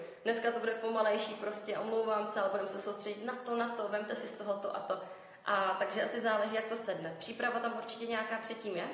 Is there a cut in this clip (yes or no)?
no